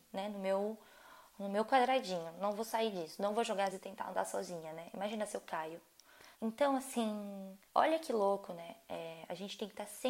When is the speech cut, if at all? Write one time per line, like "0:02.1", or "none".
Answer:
0:03.7
0:06.3
0:07.7